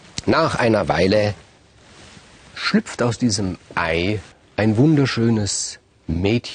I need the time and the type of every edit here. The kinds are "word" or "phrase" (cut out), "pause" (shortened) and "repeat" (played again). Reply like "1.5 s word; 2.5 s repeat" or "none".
4.3 s pause